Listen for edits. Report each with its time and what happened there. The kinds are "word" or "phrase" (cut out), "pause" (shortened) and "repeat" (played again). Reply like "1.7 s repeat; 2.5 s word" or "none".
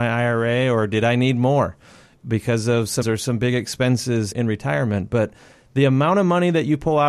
3.0 s word; 4.3 s word